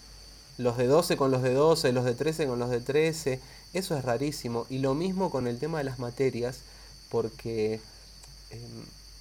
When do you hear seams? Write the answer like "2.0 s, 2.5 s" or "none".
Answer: none